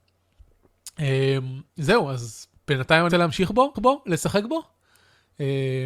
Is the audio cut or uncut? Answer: cut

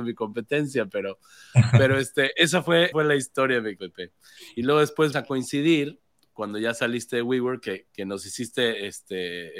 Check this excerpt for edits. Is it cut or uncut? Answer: cut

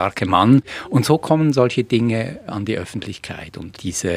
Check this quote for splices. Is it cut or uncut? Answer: uncut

